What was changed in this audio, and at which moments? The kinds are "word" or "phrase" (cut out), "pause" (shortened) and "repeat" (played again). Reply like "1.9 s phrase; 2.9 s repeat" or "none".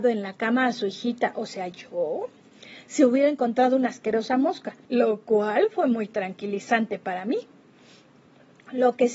4.8 s pause